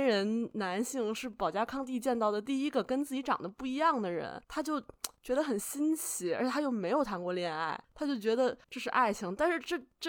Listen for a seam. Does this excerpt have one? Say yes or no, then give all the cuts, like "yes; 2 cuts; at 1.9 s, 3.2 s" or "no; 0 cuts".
yes; 4 cuts; at 4.4 s, 5.2 s, 7.8 s, 8.6 s